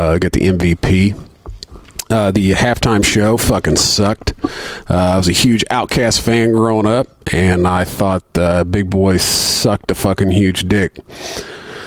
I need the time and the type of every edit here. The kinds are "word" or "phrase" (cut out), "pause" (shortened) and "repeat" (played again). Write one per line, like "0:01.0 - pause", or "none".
none